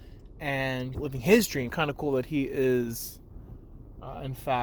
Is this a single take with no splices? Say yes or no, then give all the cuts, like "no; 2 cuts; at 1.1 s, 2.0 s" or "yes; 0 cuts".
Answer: no; 2 cuts; at 0.9 s, 1.7 s